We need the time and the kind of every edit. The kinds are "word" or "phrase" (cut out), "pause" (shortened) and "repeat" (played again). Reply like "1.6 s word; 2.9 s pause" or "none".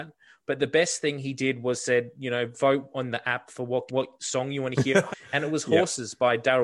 3.9 s word; 5.1 s word